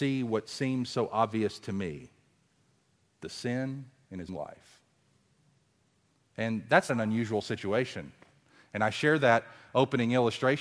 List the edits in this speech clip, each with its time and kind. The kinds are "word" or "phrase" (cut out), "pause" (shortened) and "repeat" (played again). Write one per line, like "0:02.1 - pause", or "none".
0:04.3 - word
0:06.9 - word